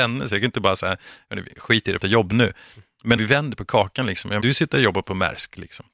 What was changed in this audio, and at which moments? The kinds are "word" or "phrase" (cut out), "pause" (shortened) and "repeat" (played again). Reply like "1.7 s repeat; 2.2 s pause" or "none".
2.0 s word; 3.2 s word; 4.4 s word